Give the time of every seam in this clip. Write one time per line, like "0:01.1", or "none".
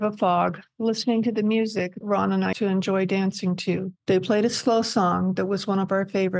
0:02.0
0:02.5
0:04.0